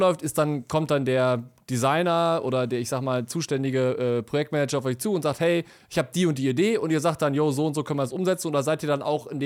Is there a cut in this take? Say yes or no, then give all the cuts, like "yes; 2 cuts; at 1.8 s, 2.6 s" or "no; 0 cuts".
no; 0 cuts